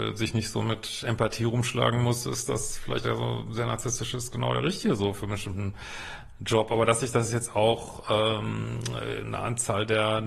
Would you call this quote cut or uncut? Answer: cut